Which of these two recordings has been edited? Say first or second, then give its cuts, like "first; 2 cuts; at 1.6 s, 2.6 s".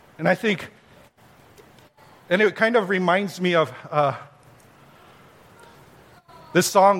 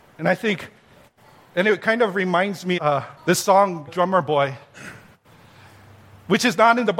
second; 4 cuts; at 1.2 s, 2.8 s, 3.2 s, 3.9 s